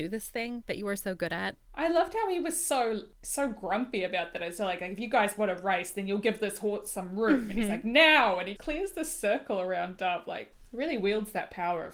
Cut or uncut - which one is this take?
cut